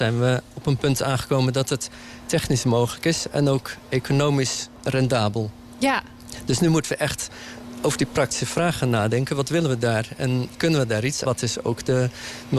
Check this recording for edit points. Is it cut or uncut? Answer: cut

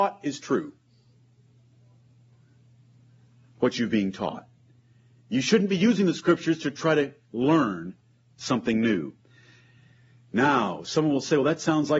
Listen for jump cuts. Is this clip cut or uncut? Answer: uncut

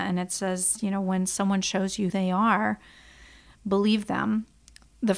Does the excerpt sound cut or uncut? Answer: cut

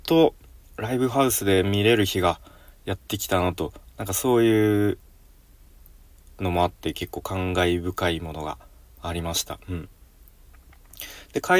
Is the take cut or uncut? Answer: uncut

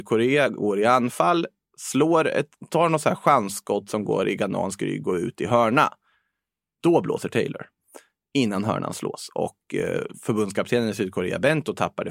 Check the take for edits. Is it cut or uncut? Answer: uncut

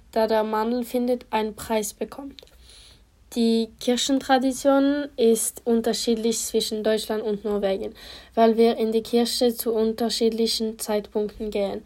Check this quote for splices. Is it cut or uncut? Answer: uncut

